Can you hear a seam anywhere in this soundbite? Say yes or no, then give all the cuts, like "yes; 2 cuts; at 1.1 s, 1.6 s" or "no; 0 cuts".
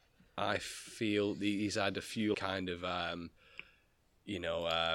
yes; 1 cut; at 2.3 s